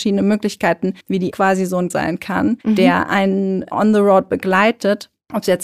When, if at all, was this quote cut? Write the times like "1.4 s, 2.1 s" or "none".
1.0 s, 1.3 s, 1.9 s, 2.6 s